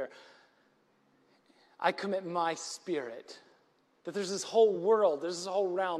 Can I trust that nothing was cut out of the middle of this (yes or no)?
yes